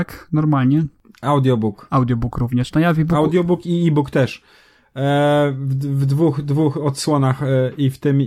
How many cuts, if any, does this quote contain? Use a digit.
0